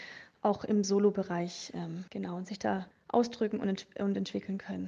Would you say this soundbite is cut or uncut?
cut